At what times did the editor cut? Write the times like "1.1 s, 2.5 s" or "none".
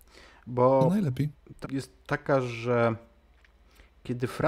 1.6 s